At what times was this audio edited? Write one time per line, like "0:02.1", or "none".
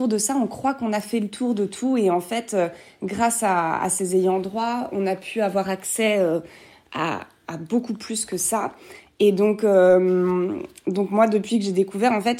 none